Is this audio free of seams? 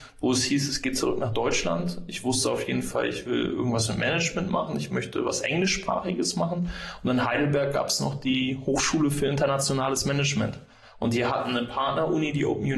yes; 0 cuts

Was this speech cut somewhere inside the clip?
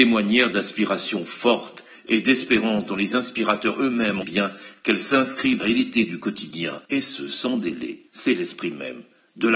yes; 4 cuts; at 4.2 s, 5.6 s, 6.9 s, 8.1 s

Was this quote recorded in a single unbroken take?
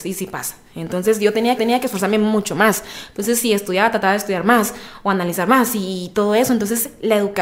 no; 1 cut; at 1.6 s

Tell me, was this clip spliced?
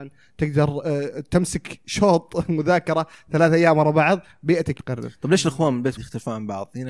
yes; 2 cuts; at 4.8 s, 6.0 s

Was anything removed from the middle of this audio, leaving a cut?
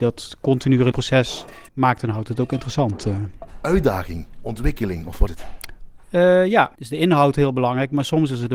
yes; 5 cuts; at 0.9 s, 1.7 s, 5.3 s, 6.0 s, 6.7 s

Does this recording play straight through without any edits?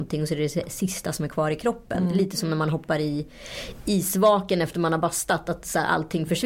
yes; 0 cuts

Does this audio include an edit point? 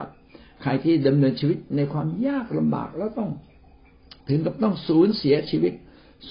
yes; 1 cut; at 4.2 s

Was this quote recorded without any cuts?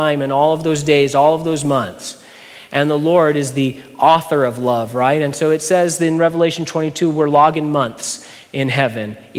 yes; 0 cuts

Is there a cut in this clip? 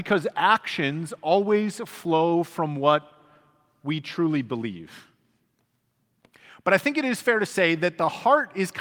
no; 0 cuts

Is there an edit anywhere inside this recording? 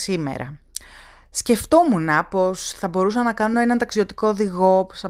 no; 0 cuts

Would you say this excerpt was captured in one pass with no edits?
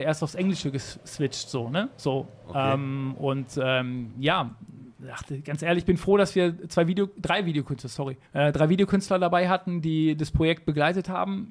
no; 2 cuts; at 1.9 s, 8.3 s

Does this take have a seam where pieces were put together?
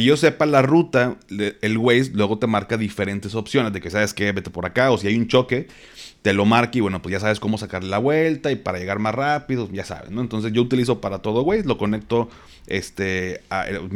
no; 0 cuts

